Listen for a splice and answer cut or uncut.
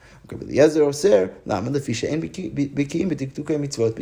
uncut